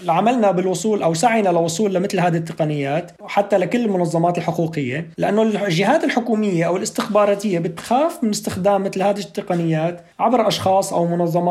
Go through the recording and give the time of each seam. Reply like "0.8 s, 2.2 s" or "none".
3.2 s, 5.1 s, 10.1 s

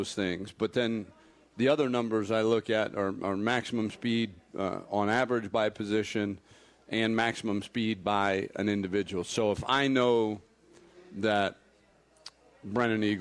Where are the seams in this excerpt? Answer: none

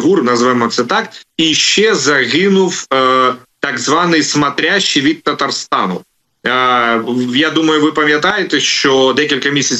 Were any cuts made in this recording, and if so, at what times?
none

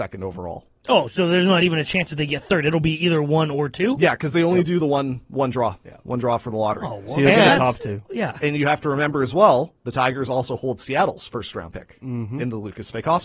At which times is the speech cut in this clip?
none

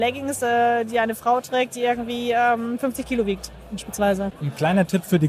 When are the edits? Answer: none

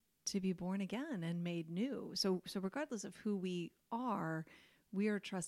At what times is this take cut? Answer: none

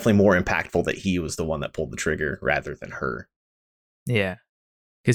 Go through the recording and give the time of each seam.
none

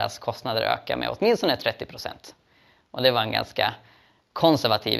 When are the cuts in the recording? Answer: none

